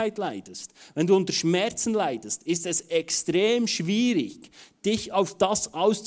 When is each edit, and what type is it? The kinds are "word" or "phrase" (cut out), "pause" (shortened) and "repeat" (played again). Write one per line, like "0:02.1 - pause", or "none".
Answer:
none